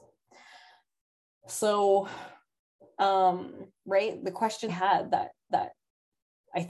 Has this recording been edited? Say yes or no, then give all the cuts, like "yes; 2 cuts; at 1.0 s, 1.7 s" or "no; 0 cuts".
yes; 3 cuts; at 4.2 s, 4.7 s, 5.5 s